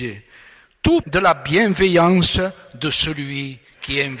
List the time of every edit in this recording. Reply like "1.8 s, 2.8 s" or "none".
1.0 s